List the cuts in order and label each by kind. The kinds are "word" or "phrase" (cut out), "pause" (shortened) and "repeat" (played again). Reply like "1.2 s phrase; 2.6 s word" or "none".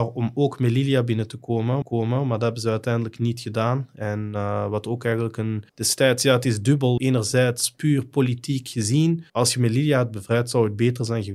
1.8 s repeat; 5.7 s pause; 7.0 s word; 9.3 s pause